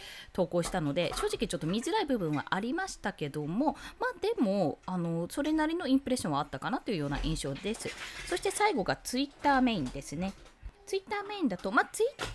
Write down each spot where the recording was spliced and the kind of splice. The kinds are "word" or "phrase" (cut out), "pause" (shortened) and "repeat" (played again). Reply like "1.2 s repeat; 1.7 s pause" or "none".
10.7 s pause